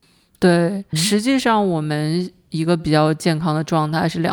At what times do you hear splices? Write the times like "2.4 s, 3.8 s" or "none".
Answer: 0.9 s